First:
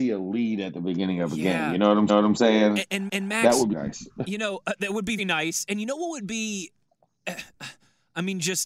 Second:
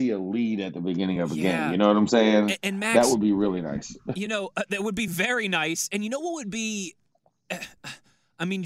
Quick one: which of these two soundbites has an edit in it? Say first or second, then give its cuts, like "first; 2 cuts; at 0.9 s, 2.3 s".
first; 4 cuts; at 2.1 s, 3.1 s, 3.7 s, 5.2 s